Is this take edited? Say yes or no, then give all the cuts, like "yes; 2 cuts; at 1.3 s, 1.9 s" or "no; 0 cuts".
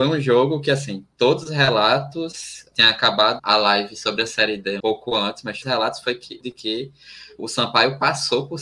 yes; 6 cuts; at 2.7 s, 3.4 s, 4.8 s, 5.6 s, 6.4 s, 7.4 s